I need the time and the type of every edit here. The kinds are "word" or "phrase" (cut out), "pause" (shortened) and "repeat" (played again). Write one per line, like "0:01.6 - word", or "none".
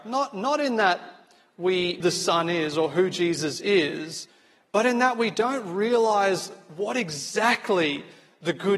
0:02.0 - phrase